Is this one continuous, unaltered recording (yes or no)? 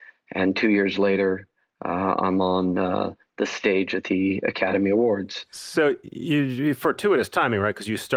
yes